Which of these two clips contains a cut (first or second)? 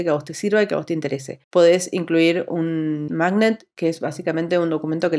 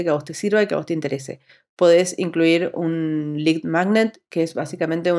first